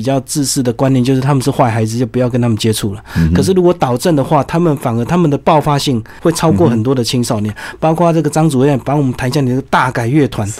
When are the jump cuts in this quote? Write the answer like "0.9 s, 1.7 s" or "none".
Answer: none